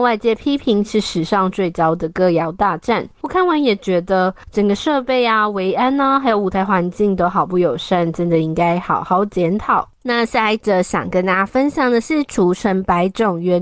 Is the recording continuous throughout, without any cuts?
yes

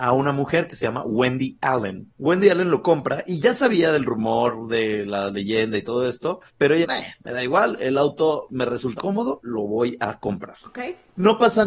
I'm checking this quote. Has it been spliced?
yes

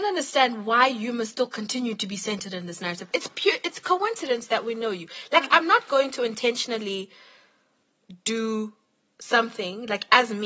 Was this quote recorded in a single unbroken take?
yes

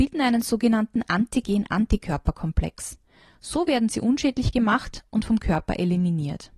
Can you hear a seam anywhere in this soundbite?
no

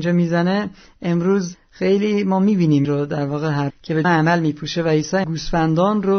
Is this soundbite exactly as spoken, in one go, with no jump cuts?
no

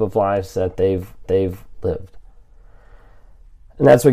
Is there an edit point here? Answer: yes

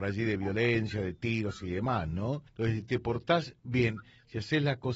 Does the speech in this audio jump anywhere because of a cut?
yes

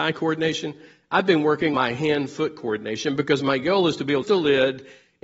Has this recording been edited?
yes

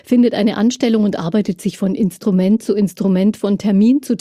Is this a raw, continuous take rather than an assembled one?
yes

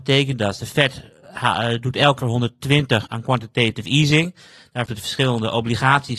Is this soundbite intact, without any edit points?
no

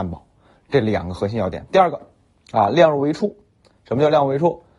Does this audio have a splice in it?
no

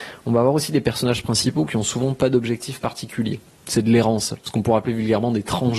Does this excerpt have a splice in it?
no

